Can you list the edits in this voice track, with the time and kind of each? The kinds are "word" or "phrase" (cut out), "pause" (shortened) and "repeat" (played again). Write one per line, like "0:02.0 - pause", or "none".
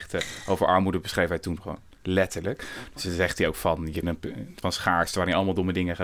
0:04.0 - phrase
0:04.6 - word